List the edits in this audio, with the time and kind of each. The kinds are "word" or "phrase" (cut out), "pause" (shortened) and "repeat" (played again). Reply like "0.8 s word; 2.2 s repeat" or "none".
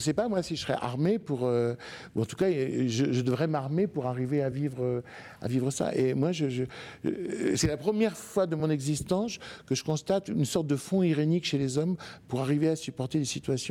none